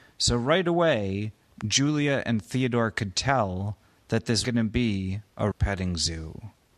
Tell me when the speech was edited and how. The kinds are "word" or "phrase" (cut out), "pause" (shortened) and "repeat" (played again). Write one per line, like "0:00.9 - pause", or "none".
0:04.4 - word
0:05.5 - word